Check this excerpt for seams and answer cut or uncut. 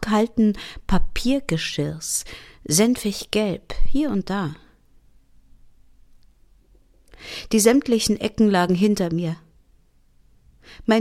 uncut